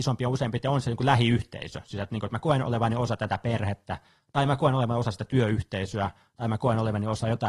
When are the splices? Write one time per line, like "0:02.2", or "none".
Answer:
none

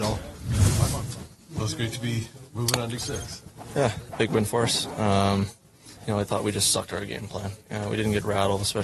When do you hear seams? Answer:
0:03.0
0:04.1
0:06.0

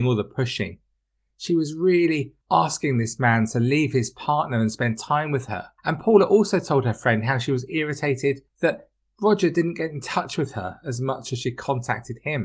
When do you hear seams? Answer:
0:02.4
0:05.8
0:08.5

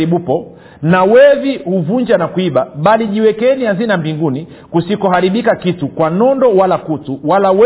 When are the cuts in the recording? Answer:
none

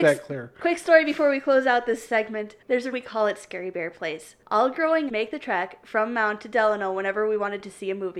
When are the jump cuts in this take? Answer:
0:02.6
0:02.9
0:04.4
0:05.1

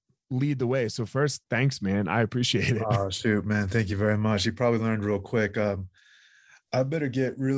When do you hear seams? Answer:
none

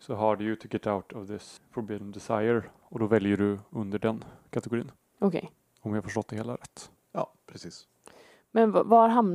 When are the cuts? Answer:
none

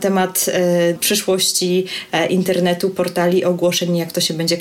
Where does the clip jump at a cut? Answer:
0:01.0

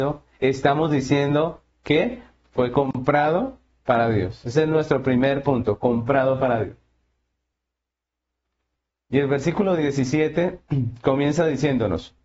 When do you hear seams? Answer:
none

